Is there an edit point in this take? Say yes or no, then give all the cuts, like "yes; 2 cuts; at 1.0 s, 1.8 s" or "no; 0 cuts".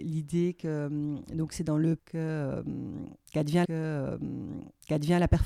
yes; 2 cuts; at 2.0 s, 3.6 s